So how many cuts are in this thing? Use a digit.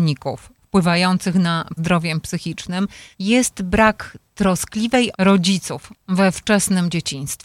3